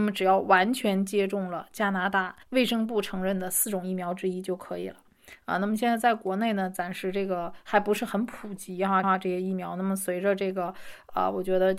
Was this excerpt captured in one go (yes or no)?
no